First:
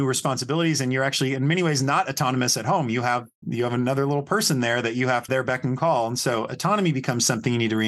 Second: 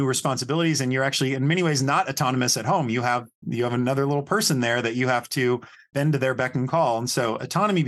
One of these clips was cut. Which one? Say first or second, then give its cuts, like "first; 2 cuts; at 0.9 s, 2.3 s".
first; 1 cut; at 5.3 s